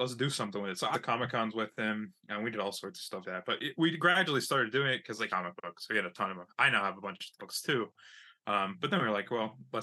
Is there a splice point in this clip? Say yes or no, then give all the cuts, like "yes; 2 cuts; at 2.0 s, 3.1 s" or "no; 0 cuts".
yes; 4 cuts; at 0.9 s, 3.2 s, 5.3 s, 7.4 s